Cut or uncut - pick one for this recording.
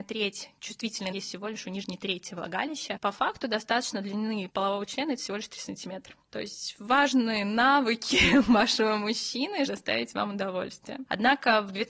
cut